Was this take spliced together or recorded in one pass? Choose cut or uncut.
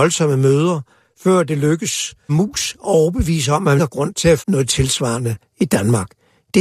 cut